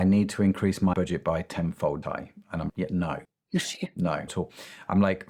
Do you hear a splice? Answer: yes; 5 cuts; at 0.9 s, 2.0 s, 2.7 s, 3.2 s, 4.3 s

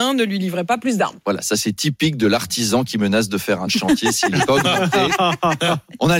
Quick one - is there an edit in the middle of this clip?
yes; 1 cut; at 3.7 s

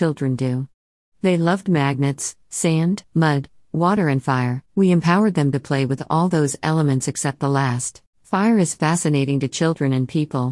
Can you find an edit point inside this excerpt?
yes; 3 cuts; at 3.0 s, 4.7 s, 8.1 s

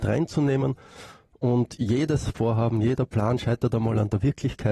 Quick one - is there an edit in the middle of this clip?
no; 0 cuts

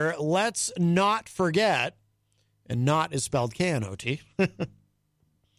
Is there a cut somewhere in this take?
no; 0 cuts

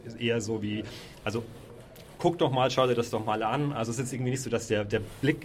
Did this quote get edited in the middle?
no; 0 cuts

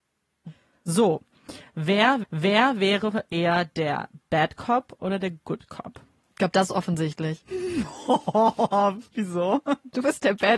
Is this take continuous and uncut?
no; 1 cut; at 2.2 s

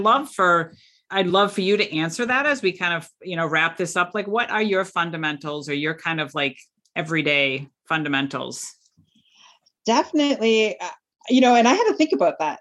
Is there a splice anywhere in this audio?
no; 0 cuts

